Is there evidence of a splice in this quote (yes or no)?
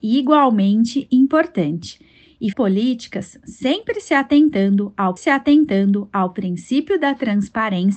yes